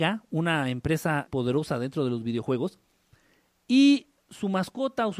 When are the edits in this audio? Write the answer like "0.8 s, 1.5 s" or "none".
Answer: 1.3 s

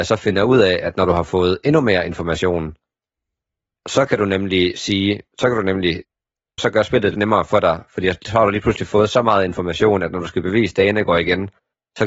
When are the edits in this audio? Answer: 5.3 s, 6.6 s, 7.1 s

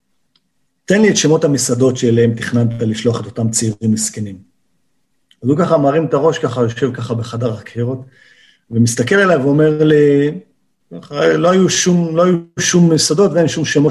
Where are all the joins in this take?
none

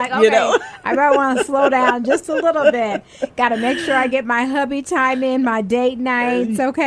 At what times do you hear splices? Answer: none

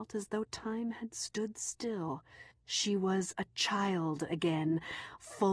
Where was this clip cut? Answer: 2.5 s

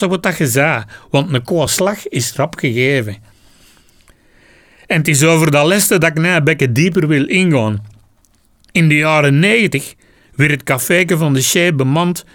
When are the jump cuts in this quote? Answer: none

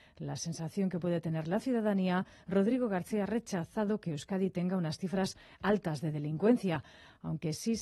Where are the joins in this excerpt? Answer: none

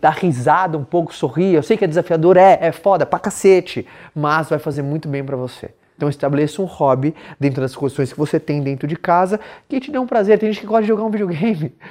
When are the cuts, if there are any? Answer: none

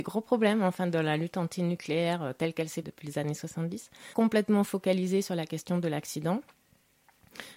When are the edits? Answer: 2.8 s, 4.1 s

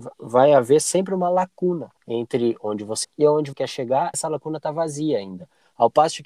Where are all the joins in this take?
2.0 s, 3.0 s, 3.5 s, 4.1 s

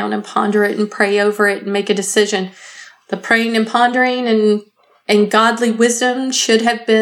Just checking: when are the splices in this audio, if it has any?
none

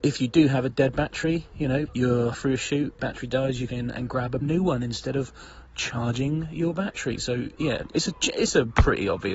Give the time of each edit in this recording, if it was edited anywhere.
1.9 s, 2.3 s, 3.0 s, 3.7 s, 4.4 s, 7.5 s

